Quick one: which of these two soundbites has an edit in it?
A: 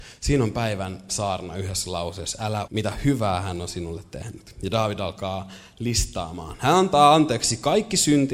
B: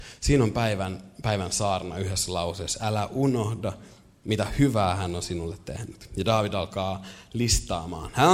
A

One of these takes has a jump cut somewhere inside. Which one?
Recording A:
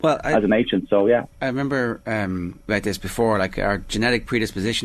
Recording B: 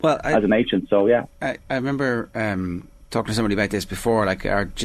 A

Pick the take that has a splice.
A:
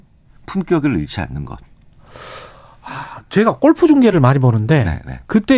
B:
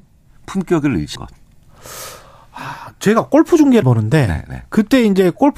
B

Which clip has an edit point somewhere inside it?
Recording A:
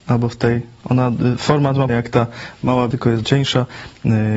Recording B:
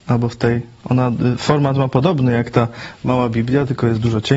A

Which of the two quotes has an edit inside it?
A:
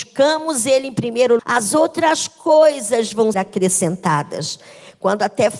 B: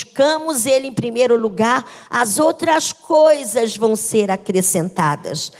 A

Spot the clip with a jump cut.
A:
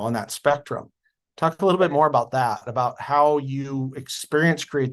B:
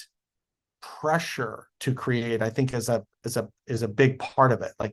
B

